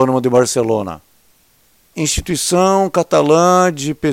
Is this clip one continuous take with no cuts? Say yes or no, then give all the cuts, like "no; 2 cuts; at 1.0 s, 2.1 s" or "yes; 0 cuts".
no; 1 cut; at 1.9 s